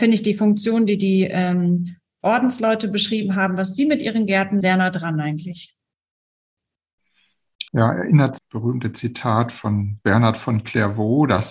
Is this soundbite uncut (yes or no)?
no